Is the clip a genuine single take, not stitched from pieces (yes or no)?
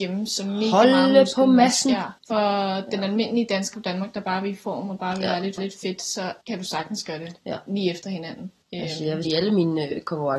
no